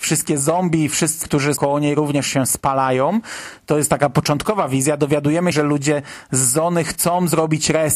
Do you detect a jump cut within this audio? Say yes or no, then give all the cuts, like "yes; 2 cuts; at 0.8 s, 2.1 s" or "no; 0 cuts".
yes; 3 cuts; at 1.2 s, 1.6 s, 5.5 s